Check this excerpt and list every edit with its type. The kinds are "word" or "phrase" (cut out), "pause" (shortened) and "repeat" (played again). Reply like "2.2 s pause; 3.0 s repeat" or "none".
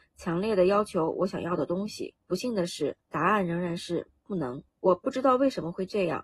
2.2 s pause; 3.0 s pause; 4.7 s pause